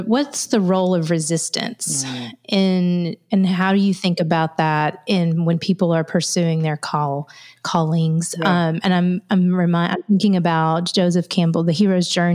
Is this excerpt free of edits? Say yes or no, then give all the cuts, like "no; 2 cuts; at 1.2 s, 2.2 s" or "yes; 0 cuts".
yes; 0 cuts